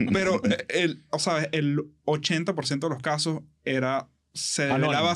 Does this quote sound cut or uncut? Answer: uncut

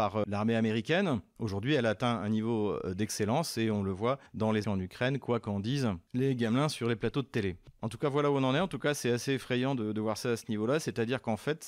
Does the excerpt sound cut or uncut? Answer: cut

